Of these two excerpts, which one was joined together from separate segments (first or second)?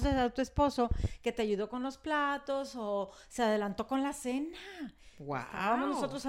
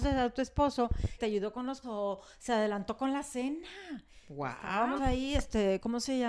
second